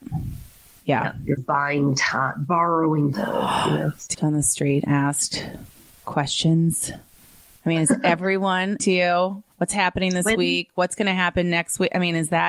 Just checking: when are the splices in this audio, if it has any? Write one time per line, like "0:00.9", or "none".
0:01.4
0:03.1
0:04.1
0:04.9
0:05.9
0:08.8
0:09.5